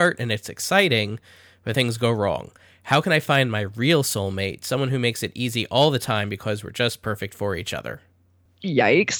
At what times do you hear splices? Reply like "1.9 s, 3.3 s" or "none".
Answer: 1.7 s